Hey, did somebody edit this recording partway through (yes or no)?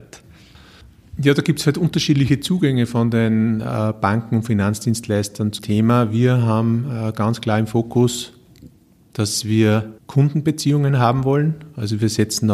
yes